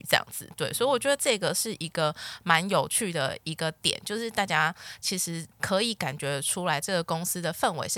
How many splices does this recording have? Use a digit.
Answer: 1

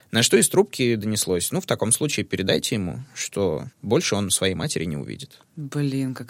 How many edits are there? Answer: 1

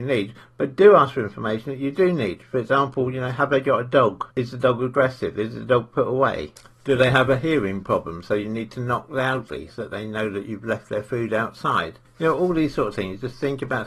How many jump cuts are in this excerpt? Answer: 2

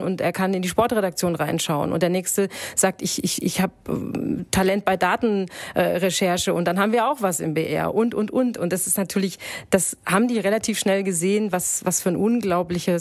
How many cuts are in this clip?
0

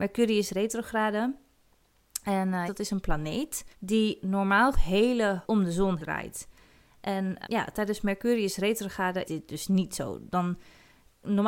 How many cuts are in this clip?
7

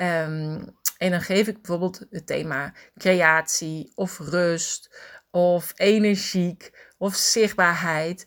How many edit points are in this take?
0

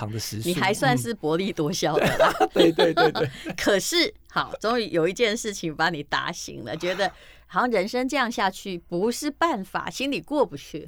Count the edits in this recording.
0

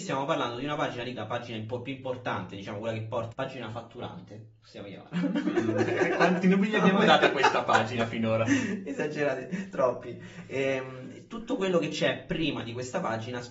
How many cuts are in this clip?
3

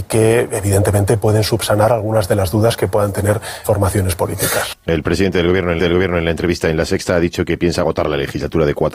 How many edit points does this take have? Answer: 3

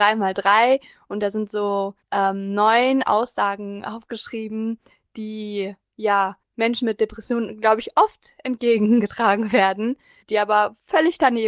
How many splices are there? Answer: 3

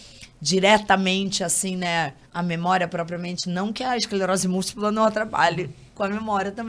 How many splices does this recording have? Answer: 1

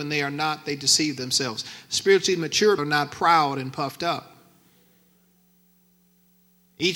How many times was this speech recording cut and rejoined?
1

